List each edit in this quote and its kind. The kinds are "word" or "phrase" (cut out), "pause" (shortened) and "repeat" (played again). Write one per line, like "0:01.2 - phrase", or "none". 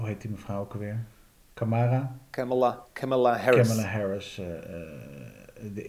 none

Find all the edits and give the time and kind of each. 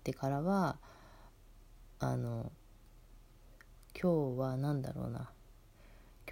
none

